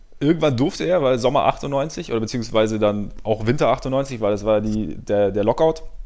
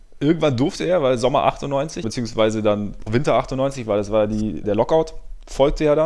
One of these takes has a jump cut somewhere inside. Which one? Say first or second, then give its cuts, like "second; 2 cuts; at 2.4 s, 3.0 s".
second; 3 cuts; at 2.0 s, 3.1 s, 4.6 s